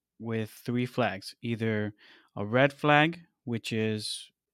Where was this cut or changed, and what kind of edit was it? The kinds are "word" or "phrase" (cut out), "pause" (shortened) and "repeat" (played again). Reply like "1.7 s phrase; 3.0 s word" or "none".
none